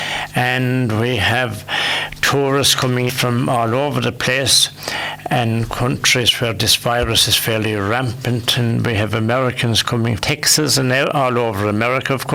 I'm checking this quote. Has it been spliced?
yes; 2 cuts; at 3.1 s, 10.2 s

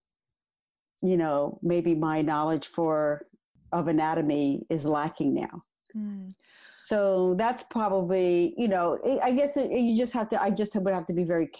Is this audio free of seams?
yes; 0 cuts

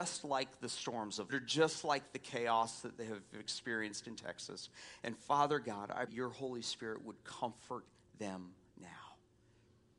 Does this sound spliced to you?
yes; 2 cuts; at 1.3 s, 6.1 s

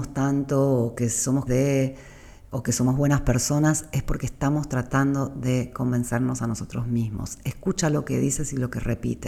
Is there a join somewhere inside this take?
yes; 1 cut; at 1.5 s

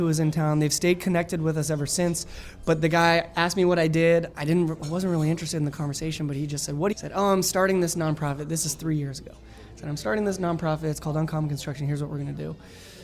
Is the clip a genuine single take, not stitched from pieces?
no; 1 cut; at 6.9 s

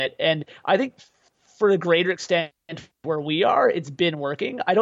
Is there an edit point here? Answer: no; 0 cuts

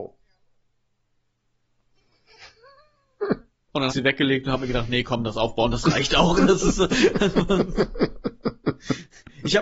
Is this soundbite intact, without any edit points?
no; 1 cut; at 3.9 s

